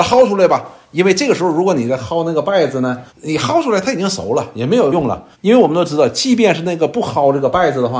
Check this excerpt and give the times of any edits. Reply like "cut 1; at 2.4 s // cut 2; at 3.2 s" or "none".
cut 1; at 3.1 s // cut 2; at 5.3 s